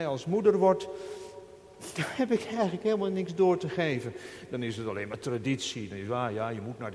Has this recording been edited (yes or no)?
no